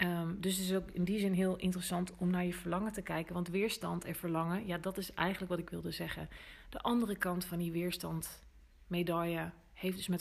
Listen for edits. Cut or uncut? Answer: uncut